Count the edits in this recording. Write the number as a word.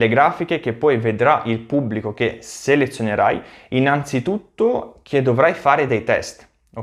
zero